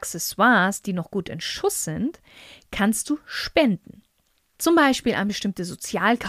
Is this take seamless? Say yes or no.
yes